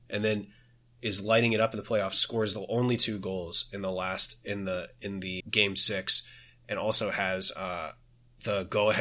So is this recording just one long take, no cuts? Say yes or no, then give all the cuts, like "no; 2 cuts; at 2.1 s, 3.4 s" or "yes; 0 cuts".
no; 1 cut; at 5.4 s